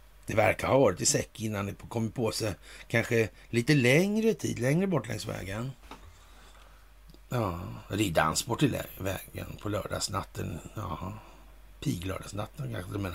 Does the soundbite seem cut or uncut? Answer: uncut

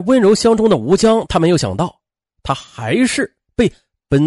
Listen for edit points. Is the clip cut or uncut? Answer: uncut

